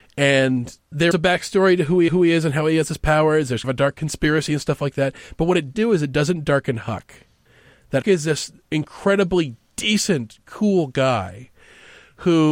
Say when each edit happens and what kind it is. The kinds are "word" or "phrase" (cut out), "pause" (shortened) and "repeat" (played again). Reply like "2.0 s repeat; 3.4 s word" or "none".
1.1 s word; 2.1 s repeat; 3.6 s word; 5.7 s word; 8.0 s word; 8.6 s pause